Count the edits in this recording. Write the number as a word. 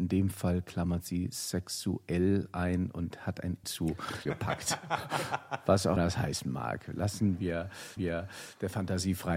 four